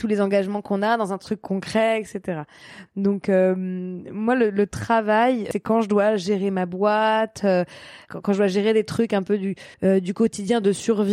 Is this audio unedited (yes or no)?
no